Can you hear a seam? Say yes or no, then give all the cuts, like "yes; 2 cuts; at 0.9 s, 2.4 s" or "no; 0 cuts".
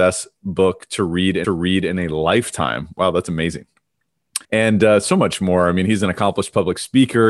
yes; 2 cuts; at 1.4 s, 4.4 s